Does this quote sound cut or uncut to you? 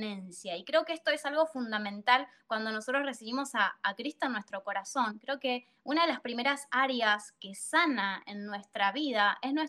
uncut